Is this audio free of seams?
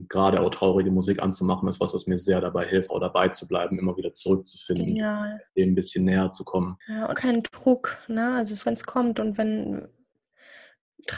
no; 5 cuts; at 2.9 s, 5.5 s, 6.8 s, 7.1 s, 8.6 s

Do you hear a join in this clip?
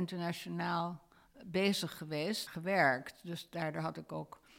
yes; 1 cut; at 2.5 s

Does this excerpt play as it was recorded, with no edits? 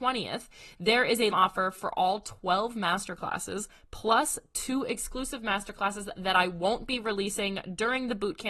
no; 1 cut; at 1.3 s

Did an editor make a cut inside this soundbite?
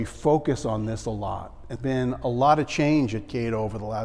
yes; 1 cut; at 1.8 s

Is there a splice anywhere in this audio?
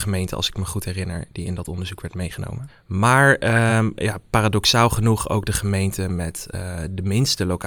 no; 0 cuts

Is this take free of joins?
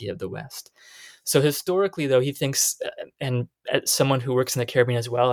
yes; 0 cuts

